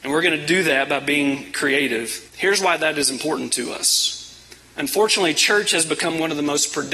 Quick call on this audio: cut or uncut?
cut